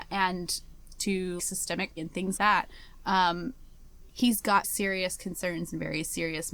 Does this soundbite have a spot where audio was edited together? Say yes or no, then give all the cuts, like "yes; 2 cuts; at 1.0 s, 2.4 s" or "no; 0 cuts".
yes; 6 cuts; at 1.0 s, 1.4 s, 2.0 s, 2.4 s, 4.1 s, 4.6 s